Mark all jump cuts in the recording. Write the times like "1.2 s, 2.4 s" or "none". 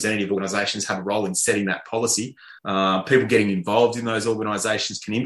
2.6 s